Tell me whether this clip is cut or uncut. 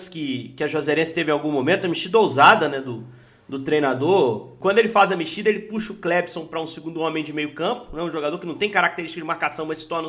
uncut